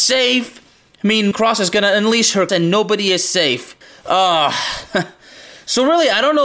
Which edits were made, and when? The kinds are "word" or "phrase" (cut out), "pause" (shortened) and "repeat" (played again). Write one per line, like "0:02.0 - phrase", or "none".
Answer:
0:01.3 - phrase
0:02.5 - word
0:03.8 - pause